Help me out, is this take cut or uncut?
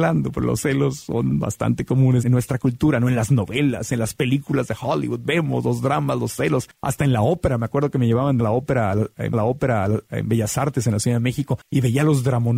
cut